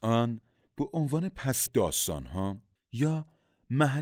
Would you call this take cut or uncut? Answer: cut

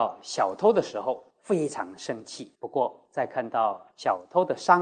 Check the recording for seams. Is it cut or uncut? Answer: cut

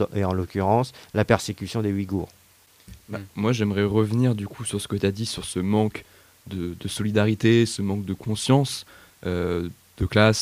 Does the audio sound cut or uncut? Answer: uncut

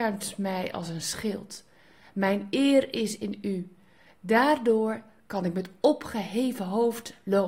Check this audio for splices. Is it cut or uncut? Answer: uncut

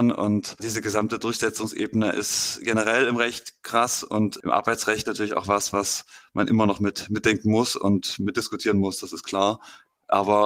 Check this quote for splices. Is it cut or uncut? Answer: uncut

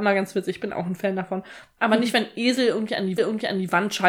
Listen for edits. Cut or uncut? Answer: cut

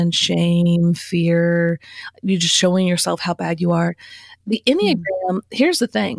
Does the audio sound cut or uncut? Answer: uncut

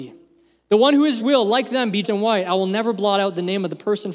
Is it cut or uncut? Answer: cut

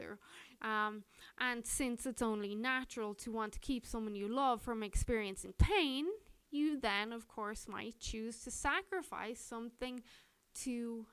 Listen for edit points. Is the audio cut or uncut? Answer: uncut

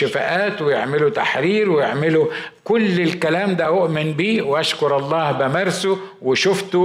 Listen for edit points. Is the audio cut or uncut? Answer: uncut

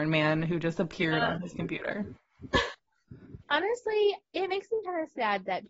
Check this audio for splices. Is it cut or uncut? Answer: cut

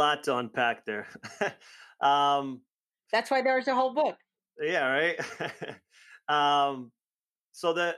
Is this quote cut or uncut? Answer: uncut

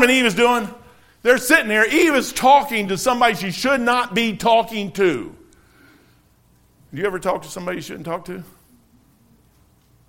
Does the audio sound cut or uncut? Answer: uncut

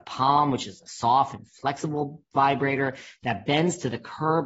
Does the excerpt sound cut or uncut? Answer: uncut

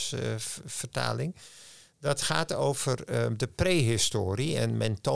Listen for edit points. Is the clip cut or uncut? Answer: uncut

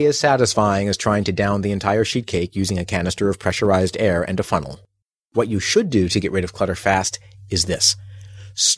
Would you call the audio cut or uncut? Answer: cut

